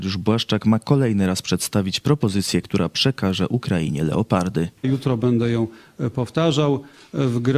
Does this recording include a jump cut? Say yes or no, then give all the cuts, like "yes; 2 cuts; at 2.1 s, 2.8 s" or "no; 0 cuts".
yes; 2 cuts; at 2.6 s, 4.8 s